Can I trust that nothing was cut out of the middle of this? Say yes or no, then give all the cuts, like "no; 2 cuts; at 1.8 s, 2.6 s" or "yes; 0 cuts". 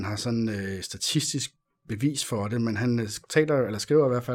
yes; 0 cuts